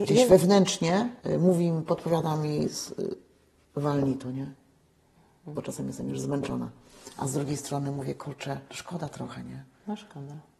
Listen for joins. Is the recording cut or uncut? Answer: cut